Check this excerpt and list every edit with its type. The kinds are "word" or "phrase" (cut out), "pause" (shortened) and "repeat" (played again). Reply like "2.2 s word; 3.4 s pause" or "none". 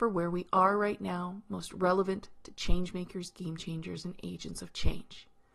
none